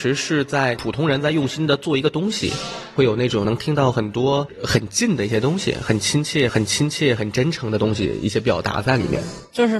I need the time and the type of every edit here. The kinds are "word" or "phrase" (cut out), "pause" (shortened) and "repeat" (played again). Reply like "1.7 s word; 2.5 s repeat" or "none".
6.5 s repeat